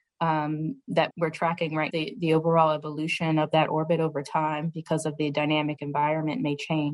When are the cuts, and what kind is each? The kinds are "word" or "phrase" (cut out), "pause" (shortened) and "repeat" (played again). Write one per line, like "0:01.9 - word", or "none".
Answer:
0:01.1 - word
0:01.9 - word

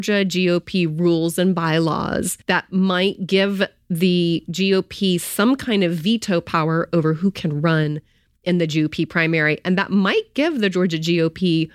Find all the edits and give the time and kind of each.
0:02.4 - pause

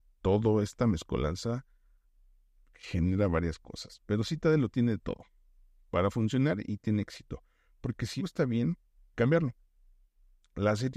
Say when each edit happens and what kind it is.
0:08.2 - word
0:09.1 - phrase

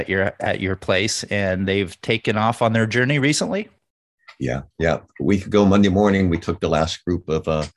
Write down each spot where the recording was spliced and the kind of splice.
0:04.7 - pause

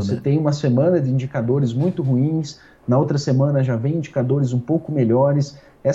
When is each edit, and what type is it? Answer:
none

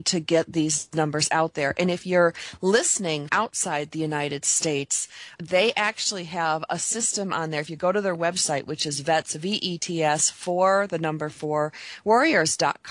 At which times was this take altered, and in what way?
0:03.3 - word
0:05.4 - word

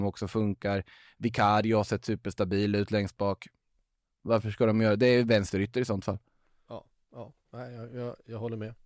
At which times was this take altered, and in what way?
none

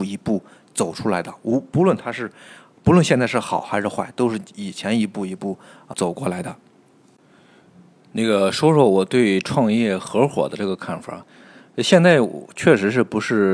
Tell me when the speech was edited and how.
0:05.9 - word

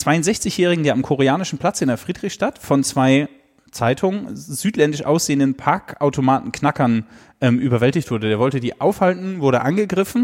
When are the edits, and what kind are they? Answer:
none

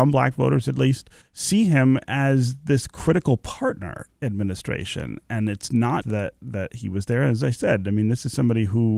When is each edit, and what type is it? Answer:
0:01.2 - pause
0:04.1 - phrase
0:06.0 - word

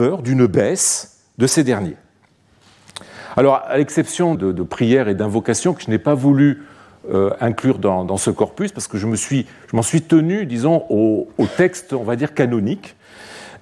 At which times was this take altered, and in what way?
0:04.4 - word

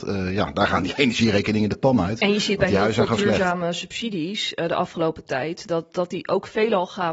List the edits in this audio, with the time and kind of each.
none

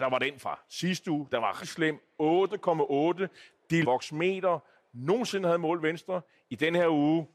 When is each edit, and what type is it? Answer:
0:01.6 - word
0:03.8 - word

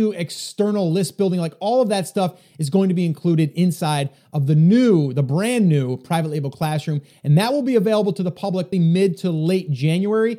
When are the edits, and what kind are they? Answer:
0:08.7 - word

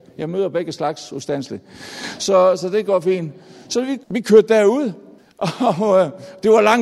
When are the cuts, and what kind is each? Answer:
0:04.0 - pause
0:05.2 - pause

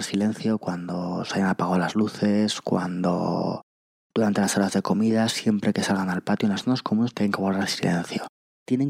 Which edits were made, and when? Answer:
none

